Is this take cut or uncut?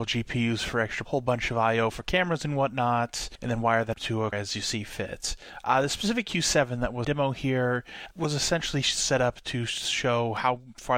cut